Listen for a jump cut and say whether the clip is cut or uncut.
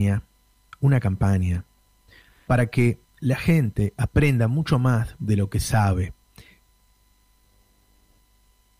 uncut